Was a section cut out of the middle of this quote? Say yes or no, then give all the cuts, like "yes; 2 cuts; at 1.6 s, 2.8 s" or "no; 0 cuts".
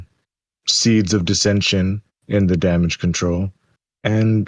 yes; 1 cut; at 2.1 s